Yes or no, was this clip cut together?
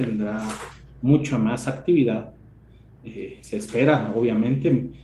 no